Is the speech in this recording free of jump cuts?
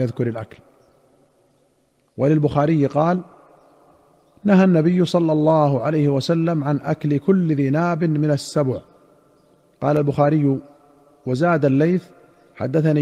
yes; 0 cuts

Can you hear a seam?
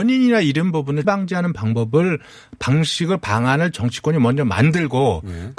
yes; 1 cut; at 1.0 s

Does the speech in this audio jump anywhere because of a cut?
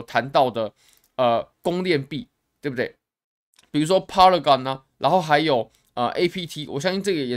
yes; 3 cuts; at 1.5 s, 2.4 s, 3.2 s

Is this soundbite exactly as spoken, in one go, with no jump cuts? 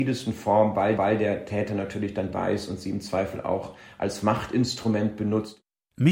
no; 2 cuts; at 1.0 s, 2.3 s

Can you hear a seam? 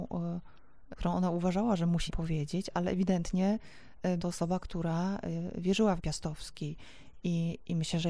yes; 5 cuts; at 0.9 s, 2.1 s, 2.7 s, 4.2 s, 6.0 s

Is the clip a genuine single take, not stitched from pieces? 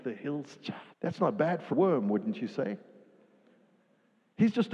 no; 2 cuts; at 0.9 s, 1.7 s

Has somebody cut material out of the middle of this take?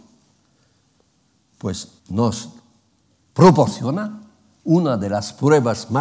yes; 1 cut; at 2.0 s

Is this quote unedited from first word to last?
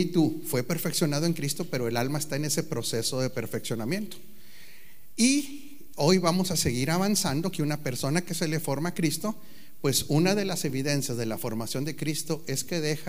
yes; 0 cuts

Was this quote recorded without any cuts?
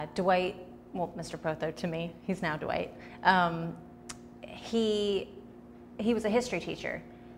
yes; 0 cuts

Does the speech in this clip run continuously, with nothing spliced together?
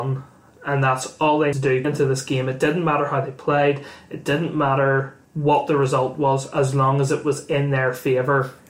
no; 3 cuts; at 1.5 s, 1.8 s, 5.2 s

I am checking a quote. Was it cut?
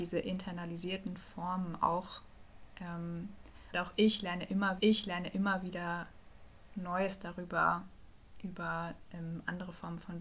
yes; 2 cuts; at 3.7 s, 4.8 s

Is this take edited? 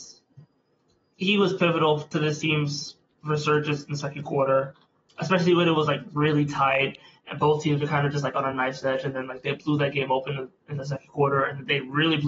no; 0 cuts

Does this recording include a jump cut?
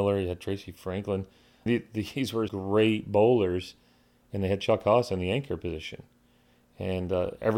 yes; 2 cuts; at 1.7 s, 2.5 s

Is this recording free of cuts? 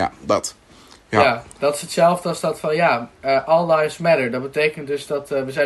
yes; 0 cuts

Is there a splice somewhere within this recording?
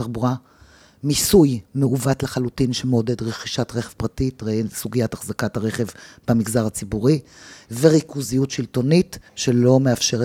yes; 1 cut; at 9.3 s

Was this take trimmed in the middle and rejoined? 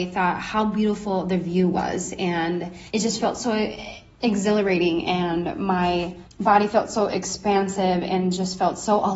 yes; 2 cuts; at 2.9 s, 6.2 s

